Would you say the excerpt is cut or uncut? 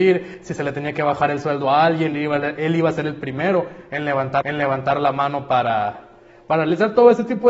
cut